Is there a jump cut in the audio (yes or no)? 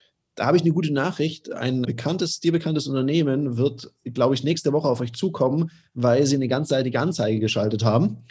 yes